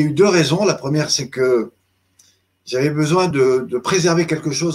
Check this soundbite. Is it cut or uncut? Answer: uncut